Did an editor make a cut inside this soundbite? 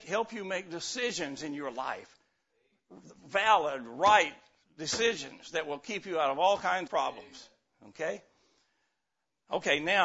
yes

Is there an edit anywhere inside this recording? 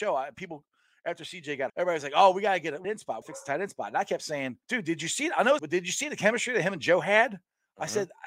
yes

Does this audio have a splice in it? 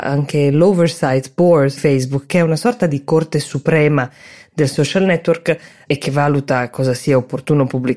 yes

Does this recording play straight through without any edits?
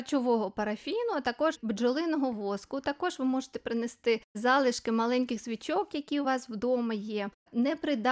yes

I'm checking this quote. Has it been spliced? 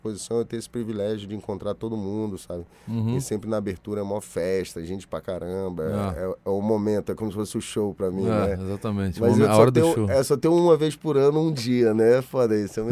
no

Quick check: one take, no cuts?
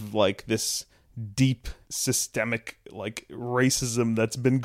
no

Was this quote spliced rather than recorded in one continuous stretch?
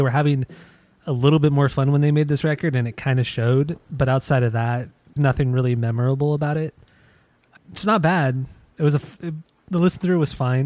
yes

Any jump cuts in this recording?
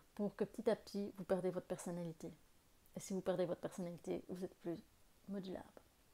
no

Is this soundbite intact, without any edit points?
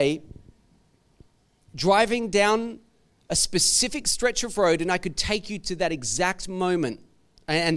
yes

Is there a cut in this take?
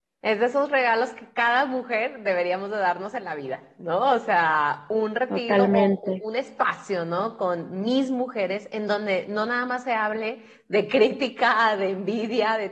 no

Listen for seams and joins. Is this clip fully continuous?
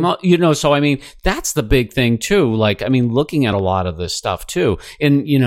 yes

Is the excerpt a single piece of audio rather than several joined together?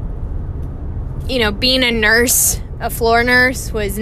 yes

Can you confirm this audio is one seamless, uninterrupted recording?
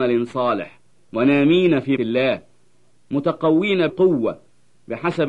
no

